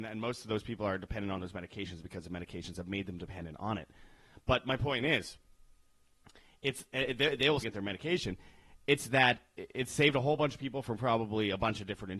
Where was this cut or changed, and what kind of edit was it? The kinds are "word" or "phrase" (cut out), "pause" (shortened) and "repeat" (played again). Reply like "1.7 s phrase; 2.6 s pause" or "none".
7.6 s word